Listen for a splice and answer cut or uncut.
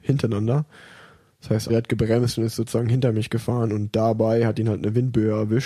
cut